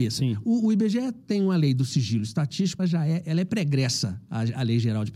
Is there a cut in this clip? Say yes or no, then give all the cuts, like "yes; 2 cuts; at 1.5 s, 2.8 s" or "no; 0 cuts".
yes; 1 cut; at 2.8 s